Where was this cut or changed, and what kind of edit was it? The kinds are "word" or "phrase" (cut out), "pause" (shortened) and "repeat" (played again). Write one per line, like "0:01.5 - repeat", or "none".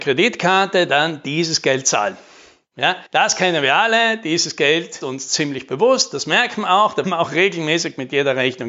0:03.1 - pause
0:05.0 - word
0:07.0 - word

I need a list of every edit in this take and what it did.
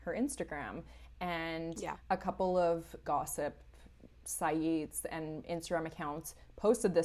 0:03.0 - word

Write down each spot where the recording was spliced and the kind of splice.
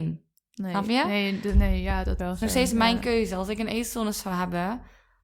0:02.2 - word

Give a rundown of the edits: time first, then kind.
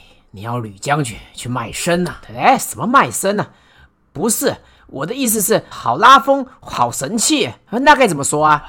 0:05.7 - word

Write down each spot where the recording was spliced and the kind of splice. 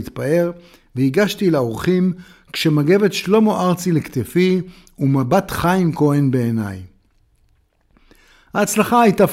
none

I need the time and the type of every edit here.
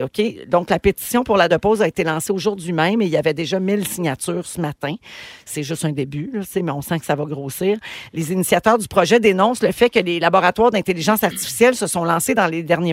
0:01.5 - word

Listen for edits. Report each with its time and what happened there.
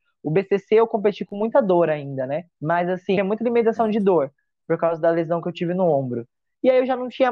0:02.5 - pause
0:03.2 - phrase

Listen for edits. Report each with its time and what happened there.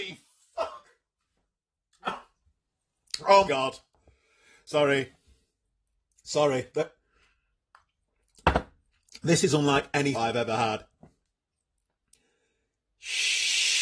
0:03.5 - word
0:10.1 - word

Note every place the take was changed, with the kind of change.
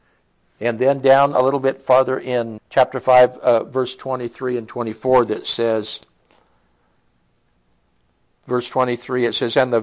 0:02.6 - word

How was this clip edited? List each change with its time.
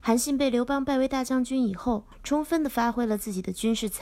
0:02.1 - pause

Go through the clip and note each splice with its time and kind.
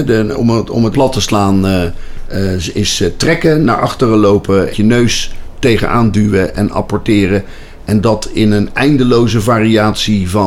0:00.9 - word
0:04.7 - phrase

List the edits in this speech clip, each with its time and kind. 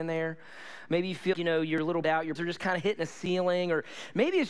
0:01.3 - word
0:02.0 - word
0:02.4 - word

